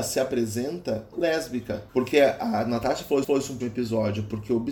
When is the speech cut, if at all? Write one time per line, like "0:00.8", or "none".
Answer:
0:01.1
0:01.9
0:03.2
0:03.6